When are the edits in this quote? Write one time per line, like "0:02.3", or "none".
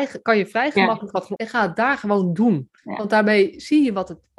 0:01.4
0:02.8